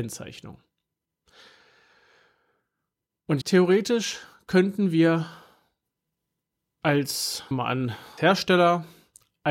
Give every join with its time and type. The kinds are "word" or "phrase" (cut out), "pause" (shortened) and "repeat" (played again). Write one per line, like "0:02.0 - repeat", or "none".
0:03.4 - word
0:07.5 - word
0:08.2 - word